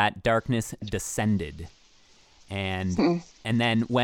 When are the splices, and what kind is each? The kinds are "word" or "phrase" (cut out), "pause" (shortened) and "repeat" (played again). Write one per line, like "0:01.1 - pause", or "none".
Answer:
none